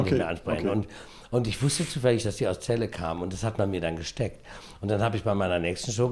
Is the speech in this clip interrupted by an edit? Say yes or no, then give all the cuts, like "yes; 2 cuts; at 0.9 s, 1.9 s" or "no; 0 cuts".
no; 0 cuts